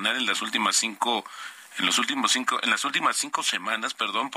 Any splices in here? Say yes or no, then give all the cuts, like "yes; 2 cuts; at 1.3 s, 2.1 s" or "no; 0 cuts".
no; 0 cuts